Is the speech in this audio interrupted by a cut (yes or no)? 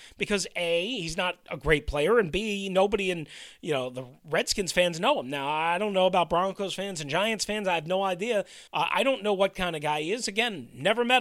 yes